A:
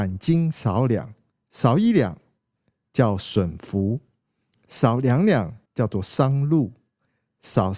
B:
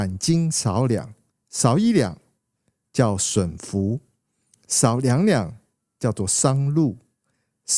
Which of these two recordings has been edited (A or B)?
A